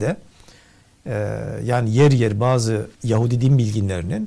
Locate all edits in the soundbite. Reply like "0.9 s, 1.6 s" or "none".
2.9 s